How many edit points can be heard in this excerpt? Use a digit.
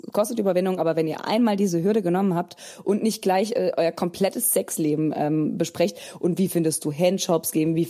0